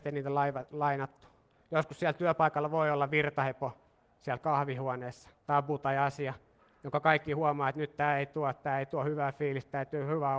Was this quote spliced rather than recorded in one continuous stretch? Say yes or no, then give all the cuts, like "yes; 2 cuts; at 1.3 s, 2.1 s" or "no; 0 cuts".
yes; 1 cut; at 5.4 s